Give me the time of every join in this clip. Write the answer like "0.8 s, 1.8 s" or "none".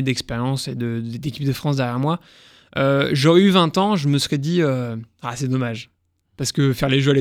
none